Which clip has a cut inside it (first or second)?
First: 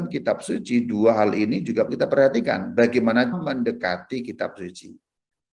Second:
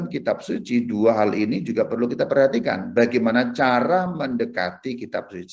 first